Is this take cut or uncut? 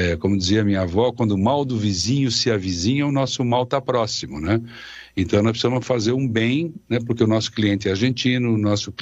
uncut